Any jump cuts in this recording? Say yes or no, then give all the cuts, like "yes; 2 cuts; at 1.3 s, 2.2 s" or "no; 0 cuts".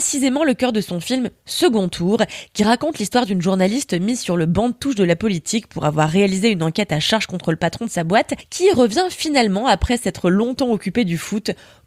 no; 0 cuts